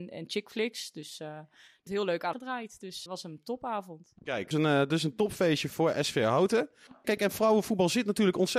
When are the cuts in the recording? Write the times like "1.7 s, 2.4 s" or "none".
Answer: 1.9 s, 2.3 s, 3.1 s, 4.5 s, 5.7 s, 7.0 s